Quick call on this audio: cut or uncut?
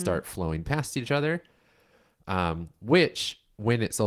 uncut